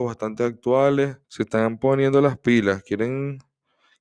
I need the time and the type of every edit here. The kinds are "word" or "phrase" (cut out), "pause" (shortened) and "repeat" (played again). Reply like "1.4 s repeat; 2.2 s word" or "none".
1.2 s pause

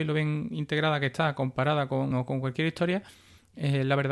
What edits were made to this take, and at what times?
2.1 s word

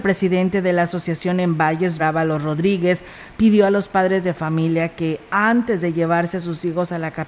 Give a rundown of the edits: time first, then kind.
2.0 s word

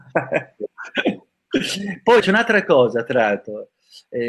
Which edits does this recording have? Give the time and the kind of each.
2.2 s word

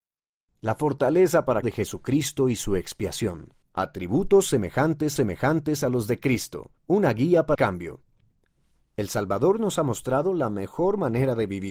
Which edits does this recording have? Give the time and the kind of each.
1.6 s phrase; 3.6 s pause; 5.2 s repeat; 6.8 s pause; 7.5 s word

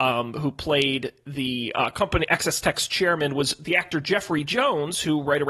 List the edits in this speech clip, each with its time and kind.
none

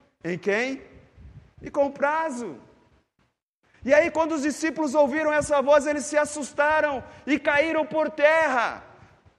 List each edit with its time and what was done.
none

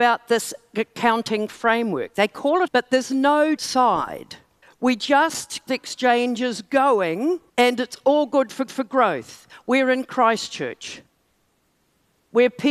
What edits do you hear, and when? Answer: 2.7 s word; 3.6 s word; 4.6 s pause; 5.7 s phrase; 7.5 s pause; 8.7 s repeat

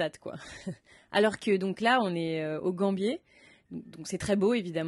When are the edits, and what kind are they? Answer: none

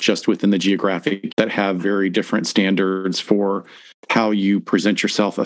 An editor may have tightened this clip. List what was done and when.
1.3 s word; 1.8 s word

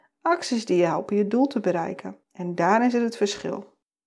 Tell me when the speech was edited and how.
2.2 s pause

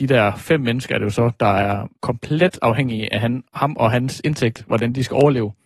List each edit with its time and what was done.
2.0 s pause; 3.5 s pause

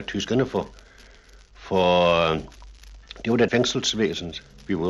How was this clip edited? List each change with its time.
3.5 s word

